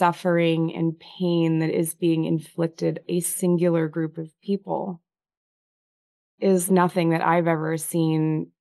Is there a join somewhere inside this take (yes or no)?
yes